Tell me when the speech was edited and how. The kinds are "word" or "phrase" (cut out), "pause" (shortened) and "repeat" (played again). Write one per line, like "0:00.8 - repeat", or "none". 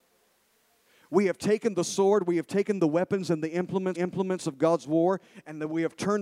0:03.9 - repeat